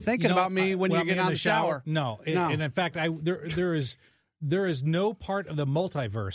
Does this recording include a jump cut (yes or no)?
no